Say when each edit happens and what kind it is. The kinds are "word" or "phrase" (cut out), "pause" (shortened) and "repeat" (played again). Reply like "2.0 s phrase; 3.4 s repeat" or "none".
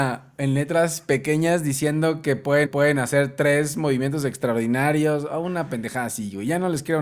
2.7 s repeat